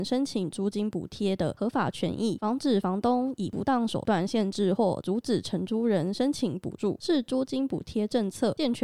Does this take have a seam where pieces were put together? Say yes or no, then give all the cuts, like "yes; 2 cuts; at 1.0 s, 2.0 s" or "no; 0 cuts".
no; 0 cuts